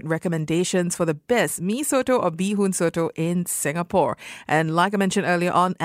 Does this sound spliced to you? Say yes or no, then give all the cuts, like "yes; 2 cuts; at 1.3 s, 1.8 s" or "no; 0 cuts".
no; 0 cuts